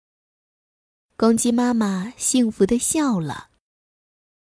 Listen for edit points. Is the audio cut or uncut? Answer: uncut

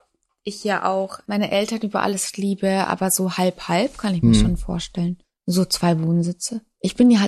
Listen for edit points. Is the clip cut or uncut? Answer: cut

